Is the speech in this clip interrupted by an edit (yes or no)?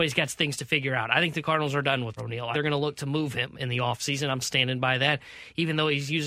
yes